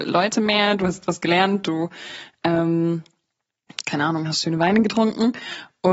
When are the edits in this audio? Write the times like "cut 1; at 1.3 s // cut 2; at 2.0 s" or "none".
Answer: none